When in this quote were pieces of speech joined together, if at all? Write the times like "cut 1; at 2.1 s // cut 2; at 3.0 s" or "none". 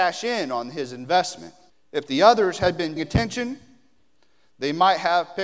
cut 1; at 1.7 s // cut 2; at 3.0 s

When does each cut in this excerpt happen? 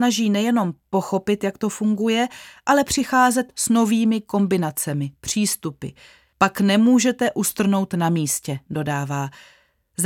none

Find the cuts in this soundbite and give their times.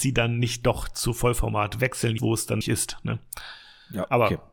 cut 1; at 2.2 s // cut 2; at 2.6 s

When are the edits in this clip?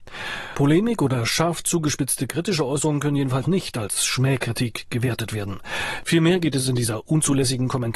cut 1; at 3.4 s

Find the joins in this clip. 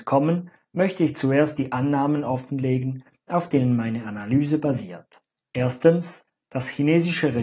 cut 1; at 5.3 s

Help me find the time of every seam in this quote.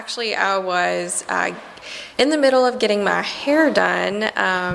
cut 1; at 2.1 s

